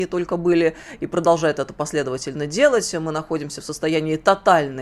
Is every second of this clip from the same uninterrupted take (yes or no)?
yes